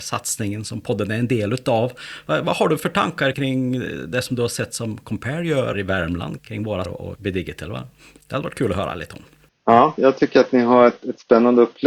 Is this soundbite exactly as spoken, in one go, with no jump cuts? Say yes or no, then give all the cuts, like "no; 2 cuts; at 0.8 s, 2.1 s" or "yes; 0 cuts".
no; 6 cuts; at 3.3 s, 5.7 s, 6.4 s, 6.8 s, 7.1 s, 10.0 s